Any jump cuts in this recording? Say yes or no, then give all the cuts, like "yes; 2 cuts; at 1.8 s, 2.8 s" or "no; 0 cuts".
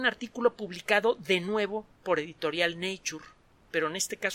no; 0 cuts